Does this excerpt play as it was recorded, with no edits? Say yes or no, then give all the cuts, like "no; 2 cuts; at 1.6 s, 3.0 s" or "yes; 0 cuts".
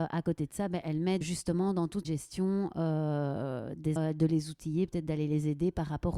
no; 3 cuts; at 1.2 s, 2.0 s, 4.0 s